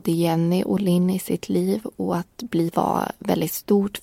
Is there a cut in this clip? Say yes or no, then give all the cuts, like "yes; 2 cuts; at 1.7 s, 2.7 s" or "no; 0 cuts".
yes; 1 cut; at 2.7 s